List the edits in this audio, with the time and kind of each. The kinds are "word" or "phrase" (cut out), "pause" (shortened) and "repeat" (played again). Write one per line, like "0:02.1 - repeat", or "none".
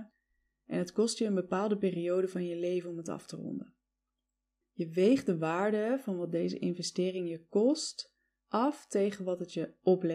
none